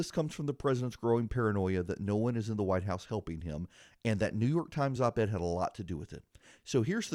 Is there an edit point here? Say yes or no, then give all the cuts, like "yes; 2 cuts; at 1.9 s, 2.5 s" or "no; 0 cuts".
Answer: no; 0 cuts